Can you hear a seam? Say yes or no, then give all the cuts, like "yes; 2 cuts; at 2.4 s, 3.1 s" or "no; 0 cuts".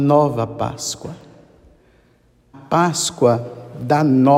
yes; 1 cut; at 2.5 s